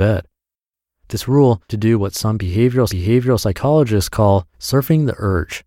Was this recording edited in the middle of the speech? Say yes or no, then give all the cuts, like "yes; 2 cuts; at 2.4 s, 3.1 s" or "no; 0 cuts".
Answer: yes; 3 cuts; at 1.7 s, 2.9 s, 4.5 s